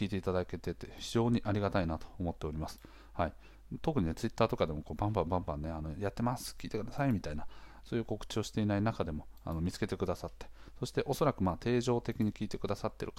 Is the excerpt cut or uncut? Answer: uncut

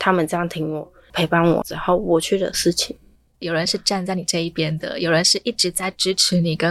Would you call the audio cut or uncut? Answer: uncut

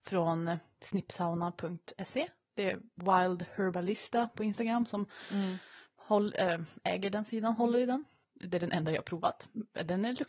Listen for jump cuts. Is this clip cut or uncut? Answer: uncut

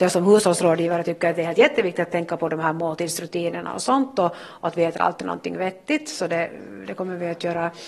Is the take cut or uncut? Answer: uncut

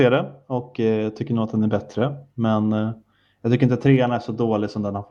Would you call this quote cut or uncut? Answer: uncut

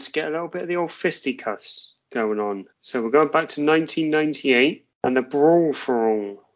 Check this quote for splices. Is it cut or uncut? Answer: cut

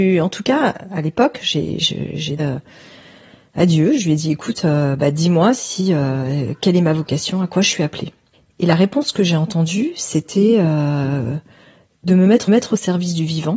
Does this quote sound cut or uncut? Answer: cut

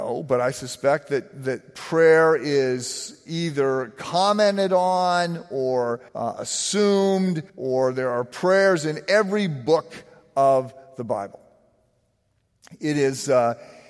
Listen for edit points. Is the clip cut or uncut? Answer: cut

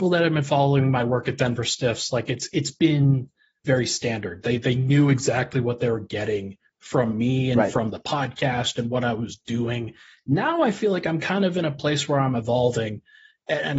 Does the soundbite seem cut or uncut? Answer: uncut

